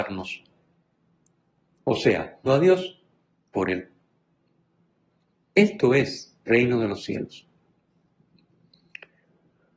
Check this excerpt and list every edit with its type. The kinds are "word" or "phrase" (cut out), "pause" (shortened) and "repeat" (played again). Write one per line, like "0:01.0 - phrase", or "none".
0:02.5 - word
0:03.5 - phrase
0:06.5 - phrase